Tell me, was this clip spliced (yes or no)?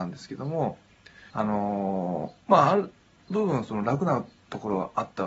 yes